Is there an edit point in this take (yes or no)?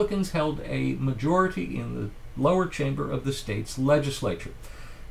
no